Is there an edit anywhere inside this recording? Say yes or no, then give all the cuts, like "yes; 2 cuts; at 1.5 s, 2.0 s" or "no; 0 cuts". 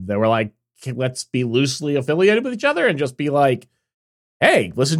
no; 0 cuts